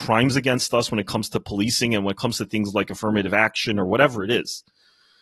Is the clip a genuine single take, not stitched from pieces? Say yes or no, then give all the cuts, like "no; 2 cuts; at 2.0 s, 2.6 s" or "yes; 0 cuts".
yes; 0 cuts